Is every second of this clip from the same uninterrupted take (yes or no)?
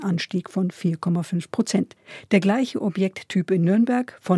yes